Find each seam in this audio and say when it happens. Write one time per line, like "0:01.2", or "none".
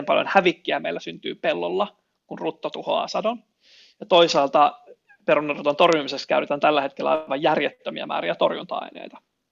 none